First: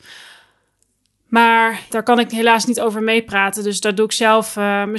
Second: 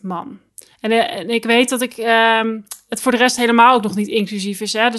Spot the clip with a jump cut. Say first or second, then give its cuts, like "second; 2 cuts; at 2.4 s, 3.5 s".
first; 1 cut; at 1.9 s